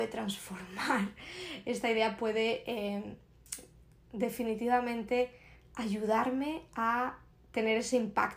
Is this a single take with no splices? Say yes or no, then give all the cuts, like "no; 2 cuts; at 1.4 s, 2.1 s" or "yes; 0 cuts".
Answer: yes; 0 cuts